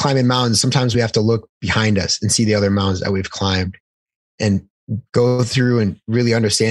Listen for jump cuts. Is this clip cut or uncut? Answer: uncut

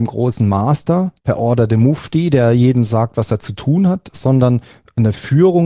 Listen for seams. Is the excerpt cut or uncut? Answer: cut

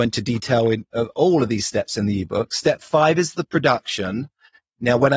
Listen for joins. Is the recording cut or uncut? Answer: uncut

